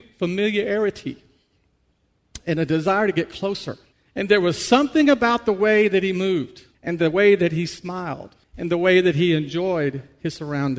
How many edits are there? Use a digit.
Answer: 3